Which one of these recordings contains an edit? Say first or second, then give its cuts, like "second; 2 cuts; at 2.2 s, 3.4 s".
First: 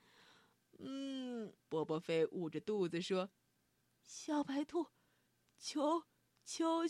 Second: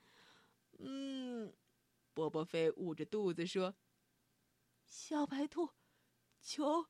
first; 2 cuts; at 1.6 s, 3.4 s